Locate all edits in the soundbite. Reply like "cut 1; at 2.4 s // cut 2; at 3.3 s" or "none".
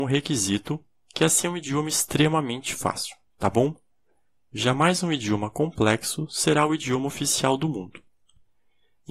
none